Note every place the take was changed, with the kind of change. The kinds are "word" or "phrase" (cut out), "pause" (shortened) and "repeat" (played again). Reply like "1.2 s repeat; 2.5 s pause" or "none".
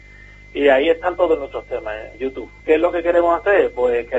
2.1 s word; 2.6 s pause